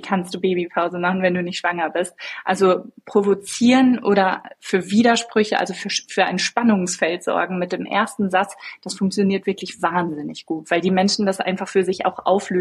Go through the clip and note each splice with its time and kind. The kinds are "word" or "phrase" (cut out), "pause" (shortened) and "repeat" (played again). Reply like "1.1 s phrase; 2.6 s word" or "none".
none